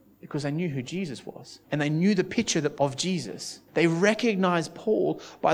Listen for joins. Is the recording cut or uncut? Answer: cut